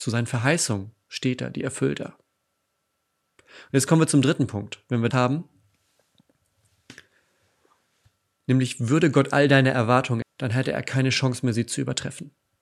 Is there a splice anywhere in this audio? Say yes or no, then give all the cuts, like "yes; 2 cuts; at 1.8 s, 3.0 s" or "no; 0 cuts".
yes; 2 cuts; at 5.1 s, 10.2 s